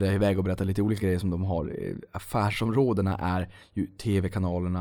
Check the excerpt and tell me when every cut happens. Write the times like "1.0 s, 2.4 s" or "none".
none